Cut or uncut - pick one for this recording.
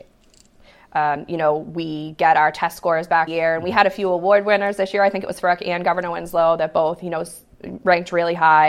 cut